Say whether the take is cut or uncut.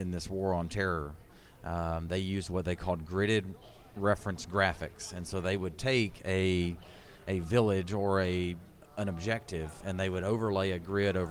uncut